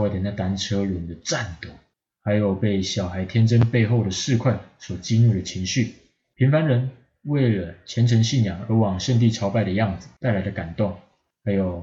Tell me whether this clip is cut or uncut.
uncut